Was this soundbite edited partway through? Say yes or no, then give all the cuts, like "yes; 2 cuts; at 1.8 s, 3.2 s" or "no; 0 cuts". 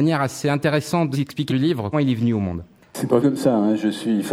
yes; 4 cuts; at 1.1 s, 1.5 s, 1.9 s, 3.2 s